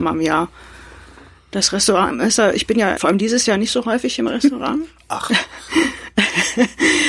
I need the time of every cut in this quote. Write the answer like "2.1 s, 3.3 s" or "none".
3.0 s